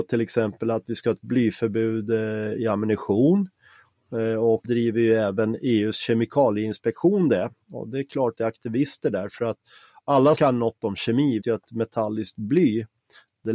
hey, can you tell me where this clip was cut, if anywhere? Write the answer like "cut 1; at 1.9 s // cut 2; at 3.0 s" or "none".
cut 1; at 4.6 s // cut 2; at 8.4 s // cut 3; at 10.4 s // cut 4; at 11.4 s